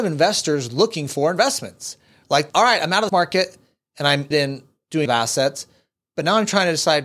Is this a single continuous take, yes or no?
no